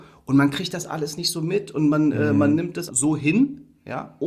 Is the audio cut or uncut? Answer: cut